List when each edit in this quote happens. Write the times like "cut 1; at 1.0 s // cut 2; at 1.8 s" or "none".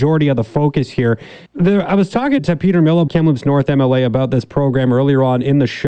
cut 1; at 1.5 s // cut 2; at 2.4 s // cut 3; at 3.1 s